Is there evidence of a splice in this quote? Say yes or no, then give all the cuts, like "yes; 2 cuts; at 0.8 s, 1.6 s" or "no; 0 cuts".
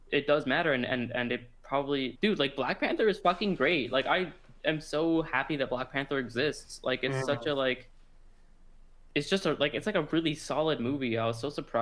yes; 1 cut; at 2.2 s